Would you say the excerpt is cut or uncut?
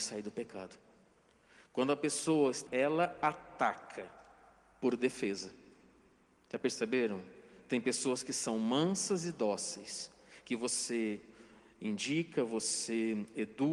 cut